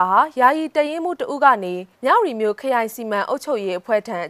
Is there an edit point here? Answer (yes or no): yes